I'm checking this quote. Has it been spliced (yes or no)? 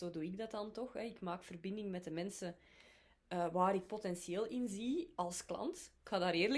no